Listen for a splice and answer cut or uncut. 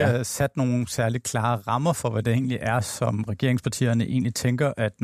uncut